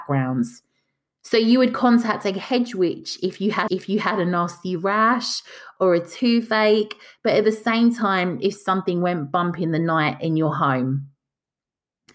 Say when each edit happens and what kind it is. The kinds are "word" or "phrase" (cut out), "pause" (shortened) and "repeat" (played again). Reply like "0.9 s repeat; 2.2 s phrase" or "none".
3.7 s repeat